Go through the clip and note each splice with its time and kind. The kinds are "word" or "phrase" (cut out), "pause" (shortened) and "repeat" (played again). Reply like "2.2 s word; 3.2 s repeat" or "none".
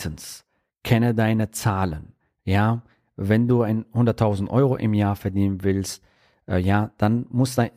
none